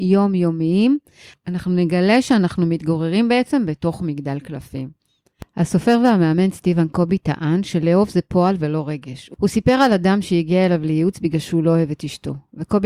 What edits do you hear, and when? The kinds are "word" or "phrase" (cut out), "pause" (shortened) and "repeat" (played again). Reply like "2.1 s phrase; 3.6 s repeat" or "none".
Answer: none